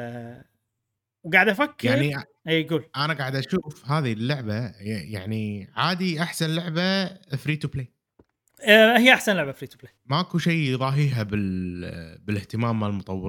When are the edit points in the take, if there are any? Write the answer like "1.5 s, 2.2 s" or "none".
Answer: 1.0 s, 10.0 s